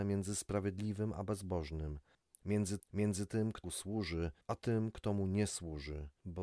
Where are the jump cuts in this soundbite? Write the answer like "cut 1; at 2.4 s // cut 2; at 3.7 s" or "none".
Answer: cut 1; at 2.8 s // cut 2; at 3.6 s